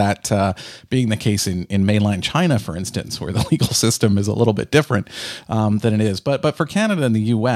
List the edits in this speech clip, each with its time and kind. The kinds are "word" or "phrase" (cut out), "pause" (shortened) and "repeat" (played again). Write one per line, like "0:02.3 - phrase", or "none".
none